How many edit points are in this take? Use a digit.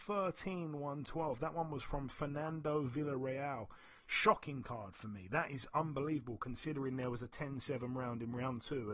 0